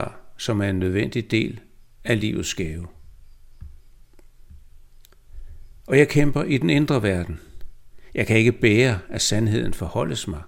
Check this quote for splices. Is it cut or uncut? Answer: uncut